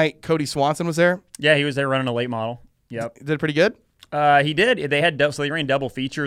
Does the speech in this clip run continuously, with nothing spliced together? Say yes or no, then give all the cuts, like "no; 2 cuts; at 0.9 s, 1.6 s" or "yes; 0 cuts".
yes; 0 cuts